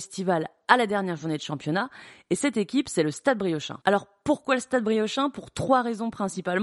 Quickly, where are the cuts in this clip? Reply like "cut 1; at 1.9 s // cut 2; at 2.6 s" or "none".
cut 1; at 3.8 s